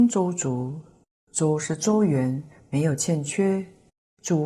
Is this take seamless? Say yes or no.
yes